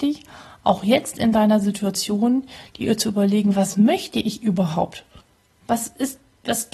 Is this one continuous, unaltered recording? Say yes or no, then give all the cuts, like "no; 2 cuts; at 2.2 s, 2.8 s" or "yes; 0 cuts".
yes; 0 cuts